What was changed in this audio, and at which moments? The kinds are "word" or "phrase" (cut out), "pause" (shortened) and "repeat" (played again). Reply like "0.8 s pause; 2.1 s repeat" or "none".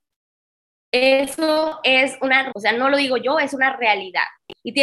2.5 s word